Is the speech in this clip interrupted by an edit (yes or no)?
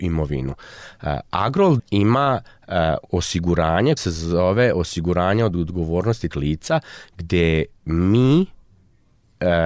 yes